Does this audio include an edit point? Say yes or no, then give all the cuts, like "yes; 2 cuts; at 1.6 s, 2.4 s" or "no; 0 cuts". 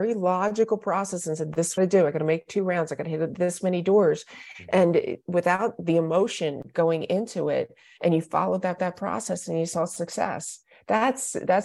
yes; 2 cuts; at 1.8 s, 8.8 s